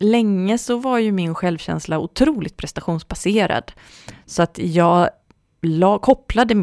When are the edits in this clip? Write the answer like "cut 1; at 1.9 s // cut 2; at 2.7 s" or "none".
none